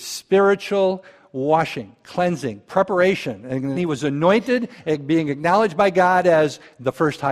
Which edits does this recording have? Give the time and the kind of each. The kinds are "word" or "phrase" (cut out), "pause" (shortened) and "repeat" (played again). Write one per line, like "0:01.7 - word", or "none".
0:03.7 - word

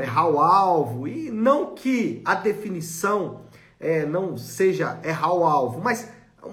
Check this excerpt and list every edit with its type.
none

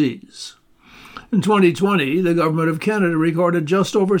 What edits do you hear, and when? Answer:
none

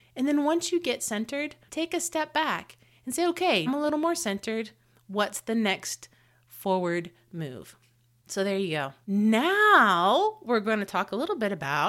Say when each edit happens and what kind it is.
0:03.7 - word
0:09.0 - pause

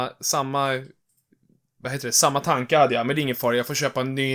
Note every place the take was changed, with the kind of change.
none

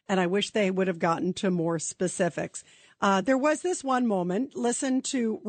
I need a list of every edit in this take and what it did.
none

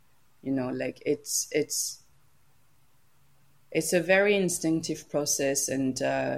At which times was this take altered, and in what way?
none

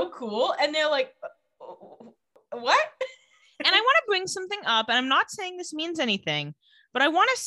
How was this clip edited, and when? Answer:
none

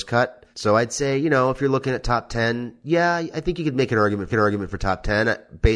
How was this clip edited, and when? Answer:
0:04.3 - repeat

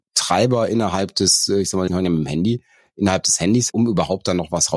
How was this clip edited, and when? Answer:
0:01.9 - word
0:03.7 - word

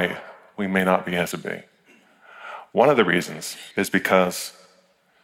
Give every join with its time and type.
0:01.3 - phrase
0:03.7 - pause

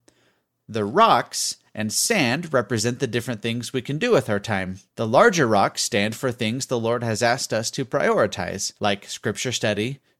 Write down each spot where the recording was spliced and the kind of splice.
0:04.9 - pause
0:08.8 - pause

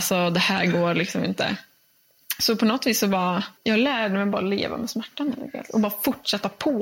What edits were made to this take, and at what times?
0:03.6 - pause

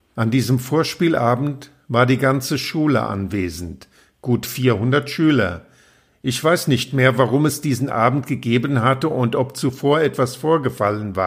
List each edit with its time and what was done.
none

